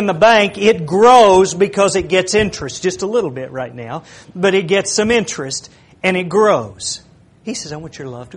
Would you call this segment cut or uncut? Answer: uncut